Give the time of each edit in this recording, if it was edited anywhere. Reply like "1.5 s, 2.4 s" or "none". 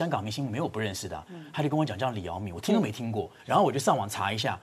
3.4 s